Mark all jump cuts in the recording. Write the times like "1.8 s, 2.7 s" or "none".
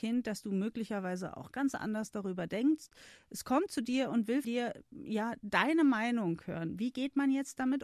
4.4 s